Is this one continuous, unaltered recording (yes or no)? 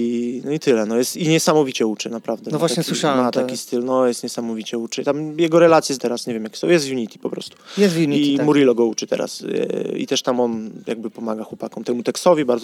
no